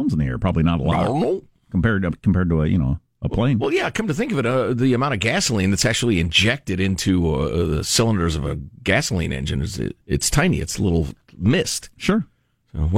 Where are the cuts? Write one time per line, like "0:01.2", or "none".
0:10.0